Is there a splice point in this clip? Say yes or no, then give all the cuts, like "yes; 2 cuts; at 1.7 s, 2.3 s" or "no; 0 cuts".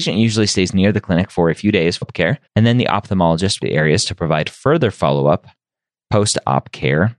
yes; 3 cuts; at 2.0 s, 2.5 s, 3.6 s